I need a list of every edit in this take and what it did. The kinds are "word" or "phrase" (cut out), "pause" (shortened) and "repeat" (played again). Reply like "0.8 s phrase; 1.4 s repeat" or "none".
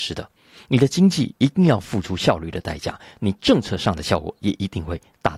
none